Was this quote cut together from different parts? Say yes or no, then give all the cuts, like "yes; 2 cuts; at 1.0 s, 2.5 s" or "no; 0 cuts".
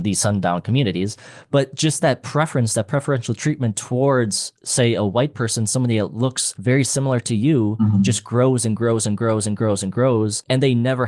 no; 0 cuts